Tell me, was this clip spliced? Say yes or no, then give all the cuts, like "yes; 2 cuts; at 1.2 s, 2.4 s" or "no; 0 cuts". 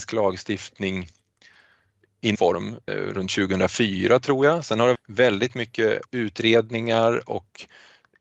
yes; 4 cuts; at 2.3 s, 2.9 s, 4.9 s, 6.0 s